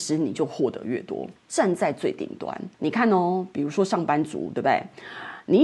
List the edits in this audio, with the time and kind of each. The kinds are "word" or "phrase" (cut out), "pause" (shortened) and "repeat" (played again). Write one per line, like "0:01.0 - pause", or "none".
0:01.4 - pause
0:02.7 - pause